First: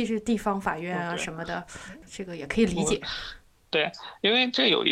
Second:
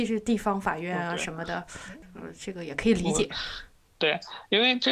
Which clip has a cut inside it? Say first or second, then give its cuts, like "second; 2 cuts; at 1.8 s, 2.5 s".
first; 1 cut; at 2.1 s